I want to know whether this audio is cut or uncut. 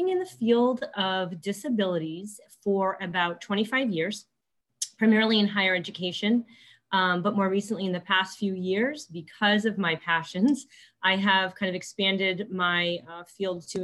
uncut